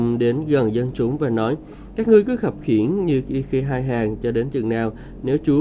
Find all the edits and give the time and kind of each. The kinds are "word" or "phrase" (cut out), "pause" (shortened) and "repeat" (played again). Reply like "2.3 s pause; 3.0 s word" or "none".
none